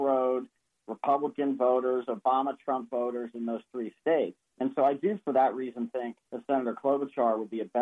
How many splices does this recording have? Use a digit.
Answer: 2